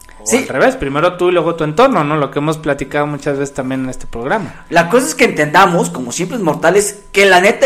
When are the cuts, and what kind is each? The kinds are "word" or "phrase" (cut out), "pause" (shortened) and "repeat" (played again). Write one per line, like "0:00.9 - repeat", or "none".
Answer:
none

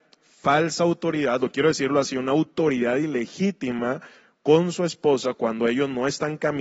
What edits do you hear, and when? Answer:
none

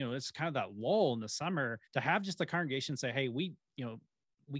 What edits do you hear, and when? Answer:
0:01.8 - pause

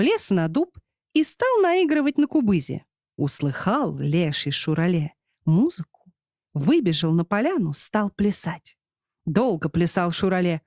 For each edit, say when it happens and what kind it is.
none

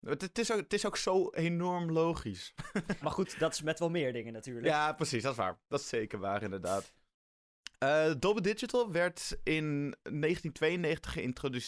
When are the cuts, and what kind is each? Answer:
0:03.0 - word

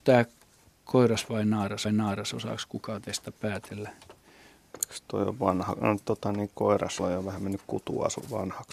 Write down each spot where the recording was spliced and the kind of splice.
0:01.8 - repeat
0:07.0 - word

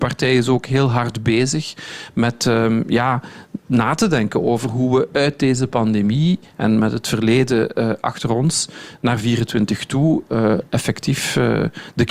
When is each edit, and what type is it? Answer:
0:03.6 - pause

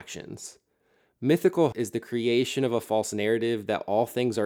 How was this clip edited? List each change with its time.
0:01.7 - word

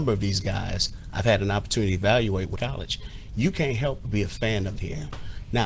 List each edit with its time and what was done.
0:02.5 - phrase
0:04.7 - phrase

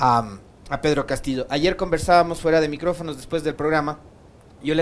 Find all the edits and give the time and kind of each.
none

